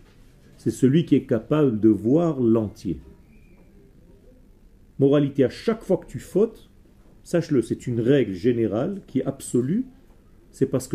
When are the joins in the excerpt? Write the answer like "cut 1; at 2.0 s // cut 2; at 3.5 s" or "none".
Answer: none